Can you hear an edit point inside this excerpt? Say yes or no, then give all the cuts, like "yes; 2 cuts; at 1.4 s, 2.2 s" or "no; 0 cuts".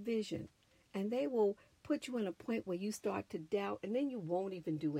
no; 0 cuts